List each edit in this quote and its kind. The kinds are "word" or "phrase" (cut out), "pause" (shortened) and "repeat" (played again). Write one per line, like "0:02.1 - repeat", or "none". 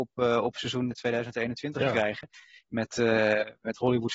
0:00.9 - word